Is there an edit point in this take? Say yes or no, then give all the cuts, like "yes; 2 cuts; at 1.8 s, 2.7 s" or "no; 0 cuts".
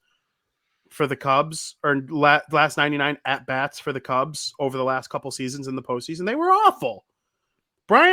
no; 0 cuts